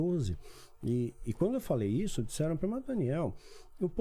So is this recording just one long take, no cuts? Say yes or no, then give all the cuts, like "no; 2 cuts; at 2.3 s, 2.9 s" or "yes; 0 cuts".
yes; 0 cuts